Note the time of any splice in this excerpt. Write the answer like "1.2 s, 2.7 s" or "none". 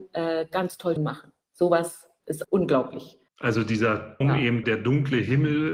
1.0 s, 2.4 s, 3.3 s, 4.2 s, 4.6 s